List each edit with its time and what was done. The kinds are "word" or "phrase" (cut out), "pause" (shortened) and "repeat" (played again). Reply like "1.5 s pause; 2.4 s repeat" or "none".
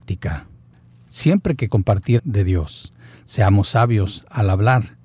1.7 s word; 2.2 s phrase